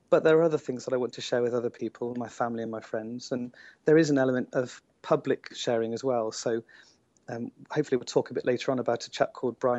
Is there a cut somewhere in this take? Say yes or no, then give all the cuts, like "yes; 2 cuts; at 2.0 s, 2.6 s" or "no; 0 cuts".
no; 0 cuts